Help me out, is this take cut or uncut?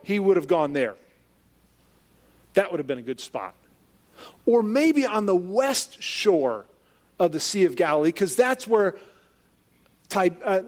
uncut